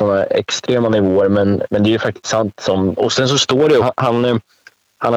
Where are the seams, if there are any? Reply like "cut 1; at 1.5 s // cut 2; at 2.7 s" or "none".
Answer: cut 1; at 1.7 s // cut 2; at 3.8 s